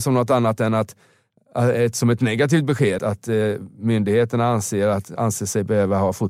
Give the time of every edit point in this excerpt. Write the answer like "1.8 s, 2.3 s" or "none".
3.0 s